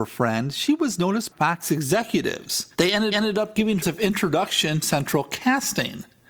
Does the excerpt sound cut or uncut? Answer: cut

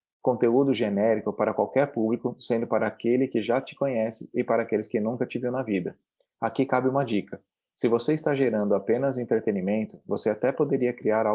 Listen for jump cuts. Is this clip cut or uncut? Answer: uncut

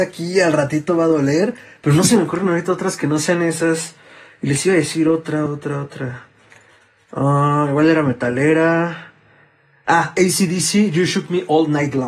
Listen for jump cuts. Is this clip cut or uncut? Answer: cut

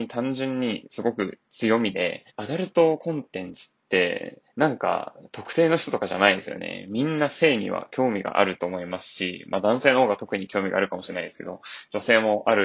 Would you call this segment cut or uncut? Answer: cut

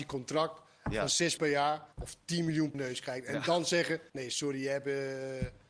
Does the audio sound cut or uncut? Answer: cut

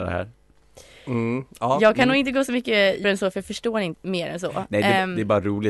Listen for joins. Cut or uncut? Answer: cut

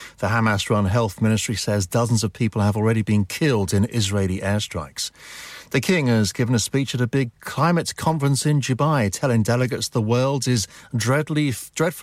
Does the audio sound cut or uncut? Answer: uncut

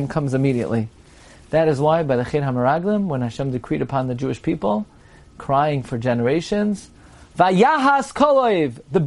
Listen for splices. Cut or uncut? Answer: uncut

